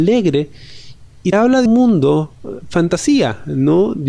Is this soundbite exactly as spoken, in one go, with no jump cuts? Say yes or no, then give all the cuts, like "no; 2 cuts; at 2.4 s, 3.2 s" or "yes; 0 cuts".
no; 3 cuts; at 1.3 s, 1.7 s, 2.6 s